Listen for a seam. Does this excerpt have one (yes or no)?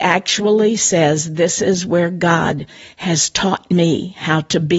no